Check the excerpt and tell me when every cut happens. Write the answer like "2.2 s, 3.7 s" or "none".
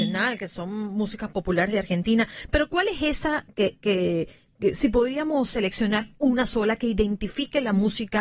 none